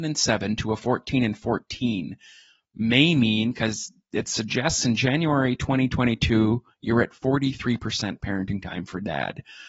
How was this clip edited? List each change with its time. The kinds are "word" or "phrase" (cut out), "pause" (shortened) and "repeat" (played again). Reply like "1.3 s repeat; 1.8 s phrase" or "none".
none